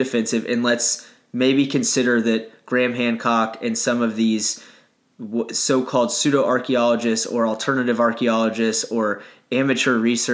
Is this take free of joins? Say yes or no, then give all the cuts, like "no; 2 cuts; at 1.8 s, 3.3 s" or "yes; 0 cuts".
yes; 0 cuts